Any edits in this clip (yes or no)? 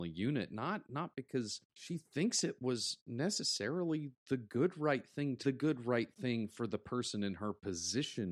yes